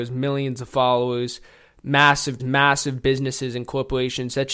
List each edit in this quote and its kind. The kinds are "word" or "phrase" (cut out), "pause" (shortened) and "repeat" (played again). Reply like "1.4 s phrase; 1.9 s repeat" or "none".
2.4 s word